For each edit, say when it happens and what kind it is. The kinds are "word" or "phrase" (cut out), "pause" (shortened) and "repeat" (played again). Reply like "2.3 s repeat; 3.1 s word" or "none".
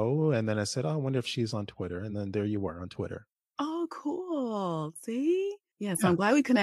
none